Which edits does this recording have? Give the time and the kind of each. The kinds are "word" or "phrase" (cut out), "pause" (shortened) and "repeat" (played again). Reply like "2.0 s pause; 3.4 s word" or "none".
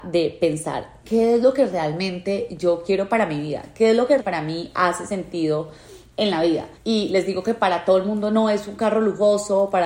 4.2 s word; 6.8 s pause